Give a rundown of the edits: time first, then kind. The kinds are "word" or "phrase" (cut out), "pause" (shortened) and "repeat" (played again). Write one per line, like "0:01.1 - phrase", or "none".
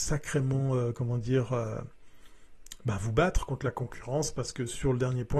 none